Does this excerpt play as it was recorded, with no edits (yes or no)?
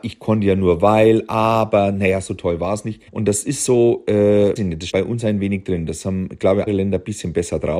no